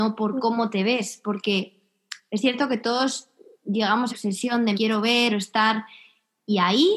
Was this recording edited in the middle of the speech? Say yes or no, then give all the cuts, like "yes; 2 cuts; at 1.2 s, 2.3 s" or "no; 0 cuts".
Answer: yes; 3 cuts; at 4.1 s, 4.7 s, 5.3 s